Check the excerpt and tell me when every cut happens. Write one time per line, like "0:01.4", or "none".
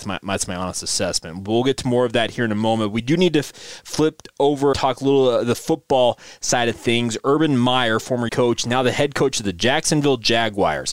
0:04.7
0:08.3

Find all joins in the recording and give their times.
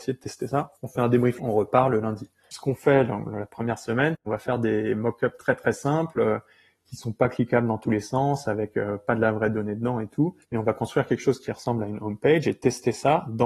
0:01.4
0:10.4

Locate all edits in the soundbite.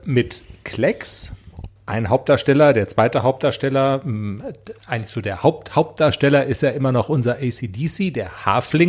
0:01.8
0:04.8

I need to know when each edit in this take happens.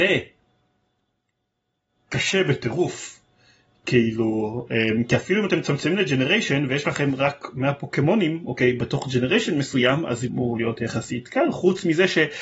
0:10.3

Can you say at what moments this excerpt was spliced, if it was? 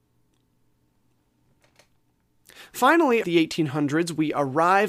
0:03.2

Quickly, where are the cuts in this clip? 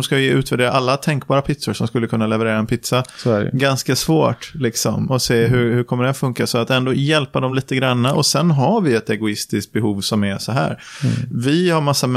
none

